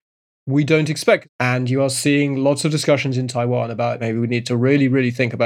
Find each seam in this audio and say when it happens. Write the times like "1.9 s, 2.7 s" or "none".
1.3 s